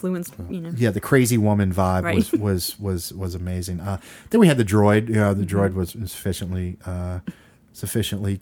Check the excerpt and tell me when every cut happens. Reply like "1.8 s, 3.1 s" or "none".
none